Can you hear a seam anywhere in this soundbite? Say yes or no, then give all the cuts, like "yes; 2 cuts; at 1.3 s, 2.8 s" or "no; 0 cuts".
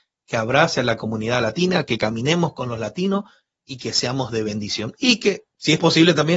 no; 0 cuts